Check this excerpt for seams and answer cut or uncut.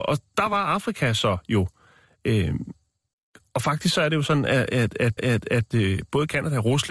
cut